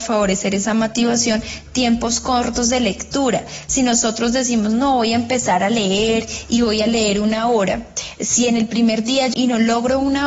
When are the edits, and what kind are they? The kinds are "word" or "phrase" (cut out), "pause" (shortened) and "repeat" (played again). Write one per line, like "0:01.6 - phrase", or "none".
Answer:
0:09.3 - word